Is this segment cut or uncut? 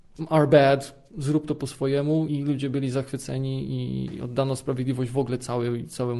cut